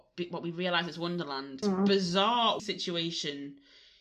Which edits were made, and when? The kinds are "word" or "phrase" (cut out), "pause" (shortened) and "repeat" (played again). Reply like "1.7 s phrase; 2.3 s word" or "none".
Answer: 1.6 s phrase; 2.6 s word